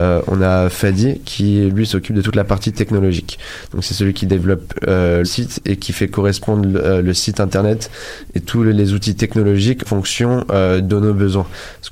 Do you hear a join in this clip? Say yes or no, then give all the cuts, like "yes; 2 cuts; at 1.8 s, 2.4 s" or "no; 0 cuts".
yes; 2 cuts; at 5.2 s, 9.8 s